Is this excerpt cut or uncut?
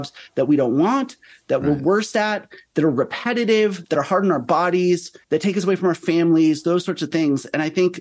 cut